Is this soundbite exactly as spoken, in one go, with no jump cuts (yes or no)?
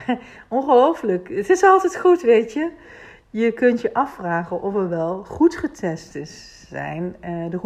yes